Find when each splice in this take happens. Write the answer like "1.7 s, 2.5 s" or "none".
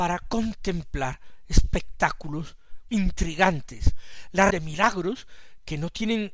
2.9 s, 4.5 s